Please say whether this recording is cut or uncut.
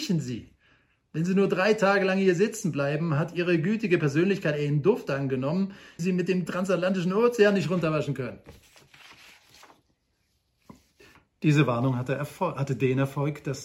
cut